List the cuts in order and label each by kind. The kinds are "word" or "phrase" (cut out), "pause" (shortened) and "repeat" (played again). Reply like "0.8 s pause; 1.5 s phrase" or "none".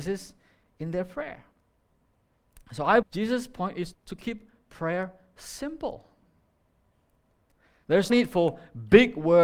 3.0 s word; 3.9 s word; 8.1 s word